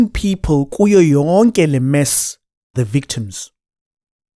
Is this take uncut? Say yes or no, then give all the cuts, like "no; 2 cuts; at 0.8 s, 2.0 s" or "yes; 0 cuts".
no; 1 cut; at 2.7 s